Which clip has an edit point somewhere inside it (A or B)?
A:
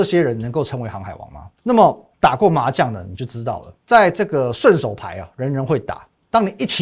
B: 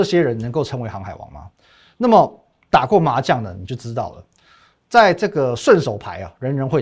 A